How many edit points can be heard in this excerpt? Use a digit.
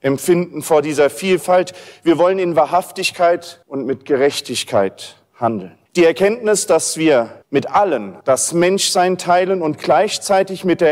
4